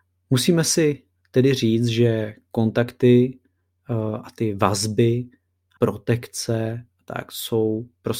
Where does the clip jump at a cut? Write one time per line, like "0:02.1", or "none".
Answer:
0:05.8